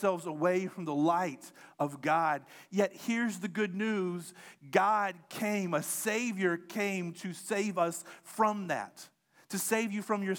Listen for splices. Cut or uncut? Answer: uncut